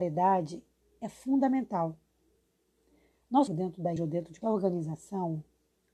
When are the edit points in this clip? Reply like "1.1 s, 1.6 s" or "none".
3.5 s, 4.0 s, 4.4 s